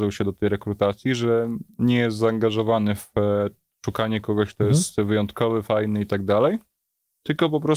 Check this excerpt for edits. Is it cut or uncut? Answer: uncut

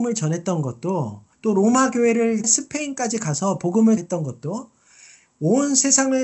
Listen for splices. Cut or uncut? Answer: cut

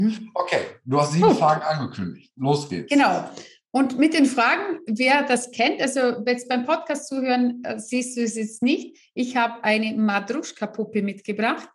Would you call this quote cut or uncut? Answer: uncut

